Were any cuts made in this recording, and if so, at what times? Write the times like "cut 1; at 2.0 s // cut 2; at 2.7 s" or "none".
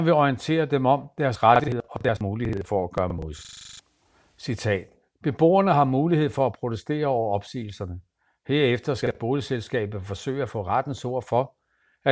none